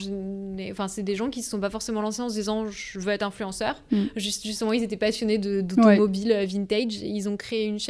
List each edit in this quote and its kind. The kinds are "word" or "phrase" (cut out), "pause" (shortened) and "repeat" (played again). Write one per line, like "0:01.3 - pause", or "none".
none

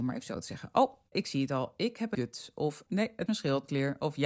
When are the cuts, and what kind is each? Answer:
0:01.1 - word
0:02.1 - word
0:02.9 - word
0:03.3 - word

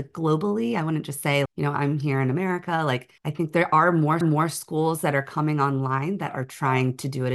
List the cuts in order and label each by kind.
0:01.5 - word
0:03.2 - pause
0:04.2 - repeat

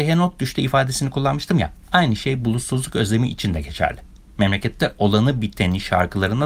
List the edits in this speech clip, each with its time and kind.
none

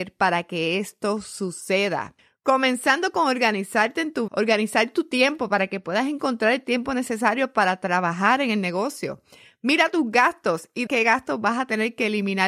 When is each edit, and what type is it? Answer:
0:04.3 - word
0:10.9 - word

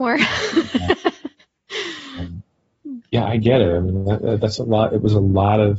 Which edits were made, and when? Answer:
none

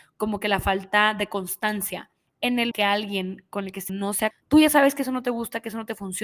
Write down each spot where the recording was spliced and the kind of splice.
0:02.3 - pause
0:02.7 - word
0:03.9 - word
0:04.3 - word

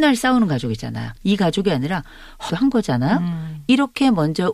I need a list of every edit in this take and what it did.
0:01.2 - pause
0:02.5 - phrase

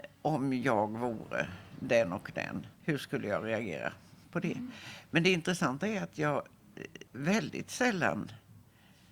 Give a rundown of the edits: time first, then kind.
0:02.7 - pause
0:04.2 - pause
0:07.1 - pause

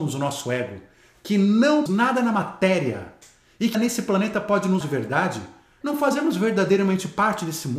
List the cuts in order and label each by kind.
0:01.9 - word
0:03.7 - word
0:04.8 - word
0:05.8 - word

